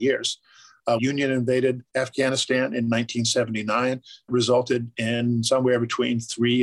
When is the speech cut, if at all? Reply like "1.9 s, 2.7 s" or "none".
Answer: 1.0 s, 1.9 s, 4.3 s